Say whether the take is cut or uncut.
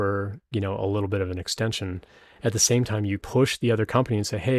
cut